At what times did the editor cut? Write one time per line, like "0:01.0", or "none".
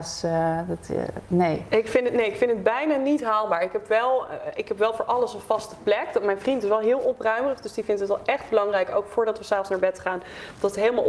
none